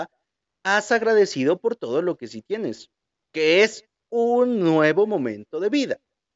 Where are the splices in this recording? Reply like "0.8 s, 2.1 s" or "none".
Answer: none

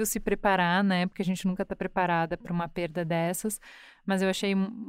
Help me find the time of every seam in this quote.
none

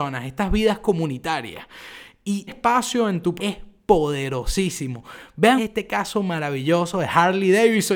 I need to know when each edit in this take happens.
2.5 s, 3.4 s, 5.6 s

